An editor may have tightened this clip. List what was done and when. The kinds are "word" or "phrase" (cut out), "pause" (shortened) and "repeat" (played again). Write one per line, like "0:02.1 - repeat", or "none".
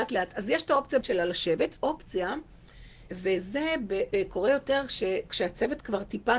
0:01.0 - word
0:01.8 - word
0:03.1 - word
0:04.1 - word